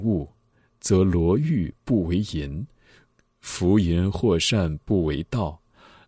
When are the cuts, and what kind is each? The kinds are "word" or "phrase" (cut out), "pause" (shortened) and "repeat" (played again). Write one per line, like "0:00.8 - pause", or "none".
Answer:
none

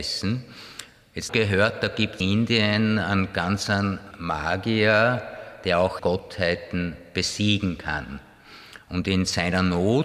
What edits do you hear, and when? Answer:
0:01.3 - phrase
0:02.2 - word
0:04.1 - word
0:06.0 - phrase

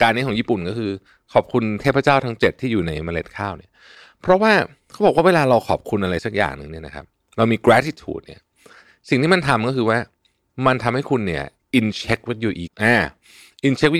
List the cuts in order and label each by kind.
0:12.7 - word

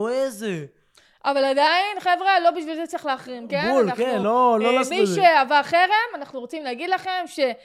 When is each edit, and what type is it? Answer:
none

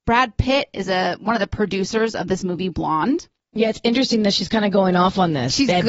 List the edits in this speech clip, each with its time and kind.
none

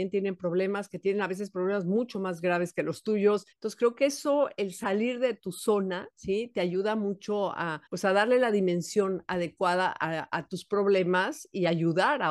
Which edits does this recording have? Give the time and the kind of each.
0:03.5 - pause
0:07.9 - pause

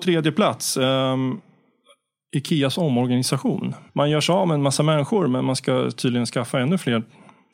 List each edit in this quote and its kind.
0:03.9 - pause

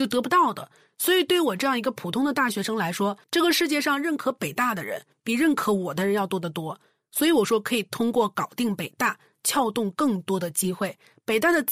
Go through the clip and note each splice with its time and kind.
0:03.2 - pause

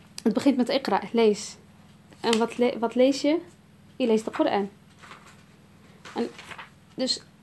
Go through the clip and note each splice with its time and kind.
none

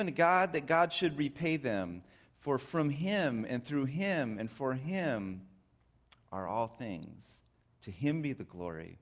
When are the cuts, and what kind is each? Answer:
none

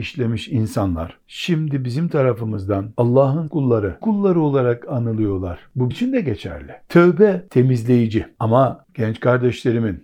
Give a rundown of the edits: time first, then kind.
0:03.5 - word
0:04.0 - word
0:05.9 - word
0:08.9 - word

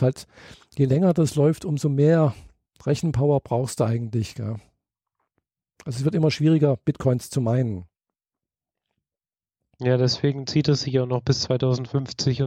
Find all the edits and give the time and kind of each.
none

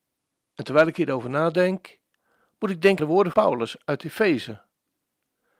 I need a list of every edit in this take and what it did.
0:03.0 - word
0:03.3 - word

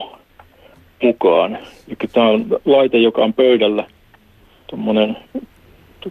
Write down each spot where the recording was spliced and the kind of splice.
none

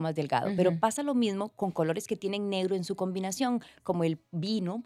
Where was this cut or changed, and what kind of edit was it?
none

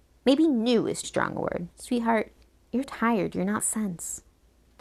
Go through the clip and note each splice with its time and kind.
0:01.0 - word
0:01.7 - pause
0:02.8 - word
0:03.6 - word

